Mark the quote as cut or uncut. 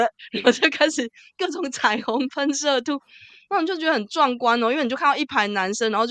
uncut